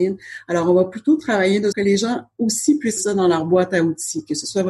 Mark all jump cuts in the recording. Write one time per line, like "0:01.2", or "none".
0:01.7
0:03.0